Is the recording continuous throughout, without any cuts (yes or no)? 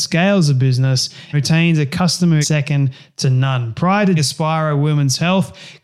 no